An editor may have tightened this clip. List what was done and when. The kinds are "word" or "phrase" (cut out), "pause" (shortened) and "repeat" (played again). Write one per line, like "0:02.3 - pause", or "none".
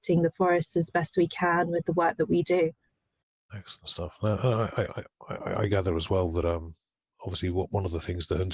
none

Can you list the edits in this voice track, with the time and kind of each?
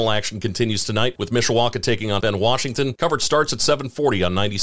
0:02.2 - word

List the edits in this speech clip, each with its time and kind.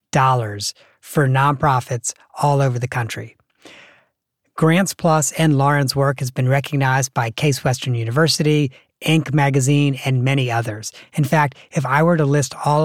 none

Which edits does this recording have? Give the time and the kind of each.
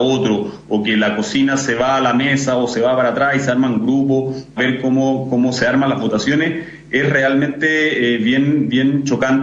0:04.6 - word

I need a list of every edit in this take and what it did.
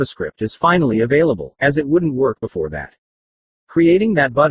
none

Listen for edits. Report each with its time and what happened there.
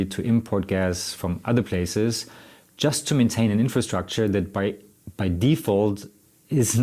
none

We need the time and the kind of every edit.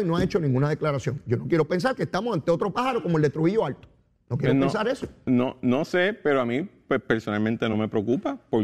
none

